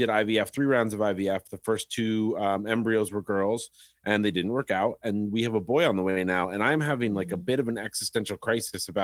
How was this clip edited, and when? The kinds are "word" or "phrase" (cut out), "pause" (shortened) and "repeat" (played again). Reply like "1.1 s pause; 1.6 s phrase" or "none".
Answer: none